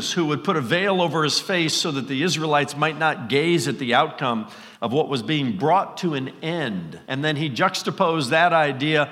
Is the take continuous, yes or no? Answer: no